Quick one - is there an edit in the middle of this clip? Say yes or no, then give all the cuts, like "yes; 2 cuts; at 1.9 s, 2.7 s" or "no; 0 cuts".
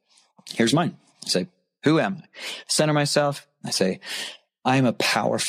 no; 0 cuts